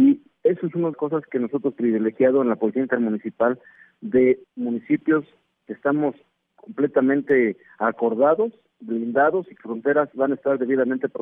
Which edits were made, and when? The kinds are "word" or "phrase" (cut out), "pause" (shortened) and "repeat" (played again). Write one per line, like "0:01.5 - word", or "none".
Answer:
0:00.9 - word
0:01.7 - word
0:04.4 - word
0:09.6 - word